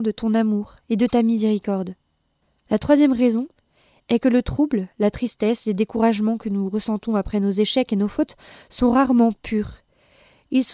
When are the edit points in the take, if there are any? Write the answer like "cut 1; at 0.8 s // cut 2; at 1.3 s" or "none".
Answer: none